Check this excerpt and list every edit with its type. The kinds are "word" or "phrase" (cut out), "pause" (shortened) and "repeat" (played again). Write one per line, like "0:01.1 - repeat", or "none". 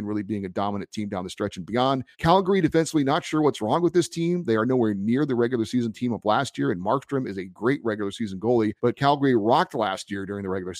0:02.1 - pause
0:08.8 - pause